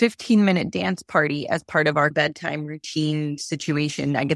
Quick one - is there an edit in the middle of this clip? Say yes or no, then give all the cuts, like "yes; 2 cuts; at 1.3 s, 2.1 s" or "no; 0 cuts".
no; 0 cuts